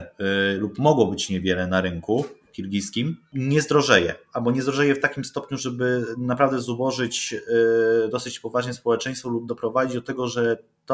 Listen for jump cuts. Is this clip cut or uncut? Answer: uncut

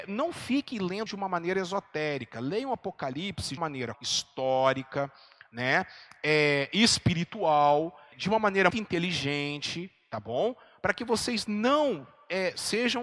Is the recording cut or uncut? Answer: cut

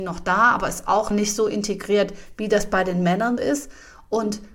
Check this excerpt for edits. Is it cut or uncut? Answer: cut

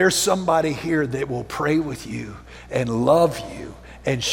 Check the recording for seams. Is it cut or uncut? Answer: uncut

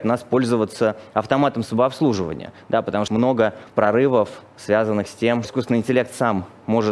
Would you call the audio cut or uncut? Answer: cut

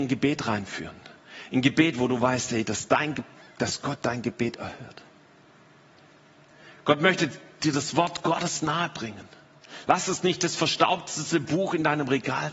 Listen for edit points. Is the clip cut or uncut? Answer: uncut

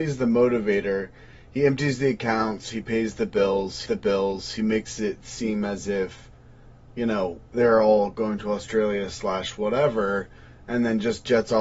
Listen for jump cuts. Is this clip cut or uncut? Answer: cut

